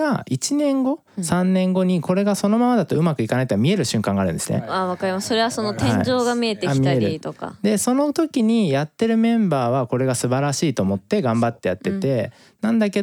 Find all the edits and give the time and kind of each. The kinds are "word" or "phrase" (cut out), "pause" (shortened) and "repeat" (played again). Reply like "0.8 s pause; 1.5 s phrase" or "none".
1.1 s pause